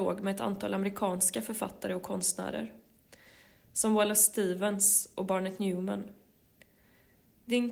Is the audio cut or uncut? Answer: uncut